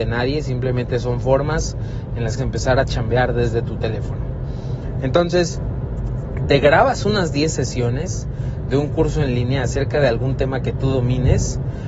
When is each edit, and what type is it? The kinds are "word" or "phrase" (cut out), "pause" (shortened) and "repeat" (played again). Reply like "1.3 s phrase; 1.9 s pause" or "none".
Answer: 2.4 s phrase